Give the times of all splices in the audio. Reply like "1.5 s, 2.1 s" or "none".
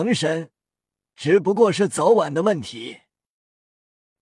none